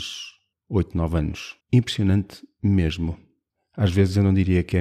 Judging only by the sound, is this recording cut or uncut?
cut